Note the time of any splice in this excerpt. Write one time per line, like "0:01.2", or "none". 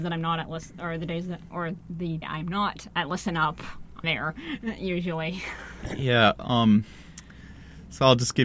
0:02.2
0:04.0